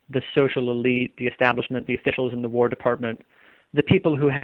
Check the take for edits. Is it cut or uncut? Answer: uncut